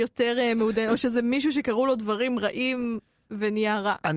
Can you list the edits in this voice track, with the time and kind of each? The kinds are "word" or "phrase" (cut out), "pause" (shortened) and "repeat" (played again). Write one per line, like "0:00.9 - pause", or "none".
none